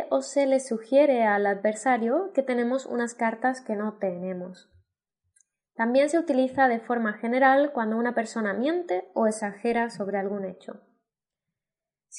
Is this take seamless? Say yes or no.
yes